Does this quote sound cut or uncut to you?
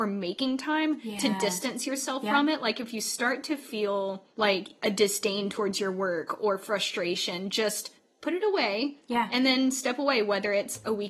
cut